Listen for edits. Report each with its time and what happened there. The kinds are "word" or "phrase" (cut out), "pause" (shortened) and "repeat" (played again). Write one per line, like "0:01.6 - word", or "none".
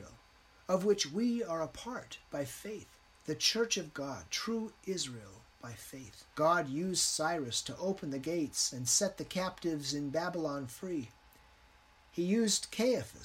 0:02.2 - pause
0:03.1 - pause
0:06.3 - pause